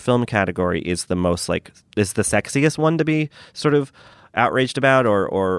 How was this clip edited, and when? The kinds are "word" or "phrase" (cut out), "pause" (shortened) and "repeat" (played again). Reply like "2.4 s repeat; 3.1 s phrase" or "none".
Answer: none